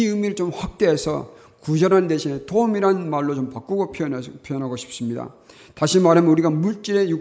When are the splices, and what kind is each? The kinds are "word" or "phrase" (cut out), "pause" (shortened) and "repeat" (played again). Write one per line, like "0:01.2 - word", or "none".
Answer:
none